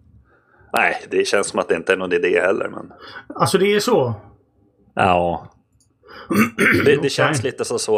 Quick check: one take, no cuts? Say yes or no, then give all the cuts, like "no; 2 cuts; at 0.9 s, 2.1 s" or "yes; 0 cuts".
yes; 0 cuts